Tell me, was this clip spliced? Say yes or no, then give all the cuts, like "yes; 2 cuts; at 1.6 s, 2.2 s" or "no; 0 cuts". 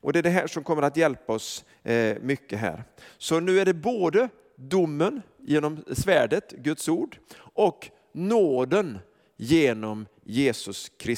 no; 0 cuts